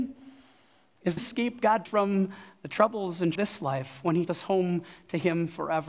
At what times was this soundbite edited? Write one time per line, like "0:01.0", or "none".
0:01.2
0:01.9
0:03.4
0:04.3

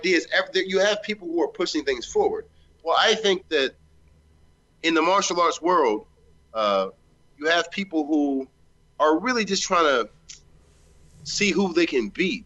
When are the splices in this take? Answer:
none

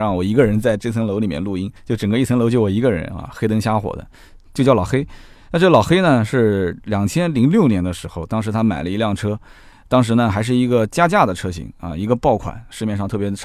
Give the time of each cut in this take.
0:01.8

